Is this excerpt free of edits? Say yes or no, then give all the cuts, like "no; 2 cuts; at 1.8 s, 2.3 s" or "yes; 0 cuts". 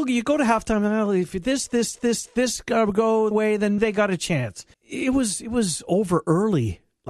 no; 4 cuts; at 2.0 s, 3.3 s, 3.8 s, 4.7 s